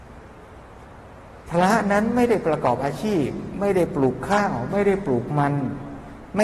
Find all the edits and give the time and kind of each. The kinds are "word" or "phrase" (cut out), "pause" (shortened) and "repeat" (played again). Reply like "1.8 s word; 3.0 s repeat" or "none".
1.4 s pause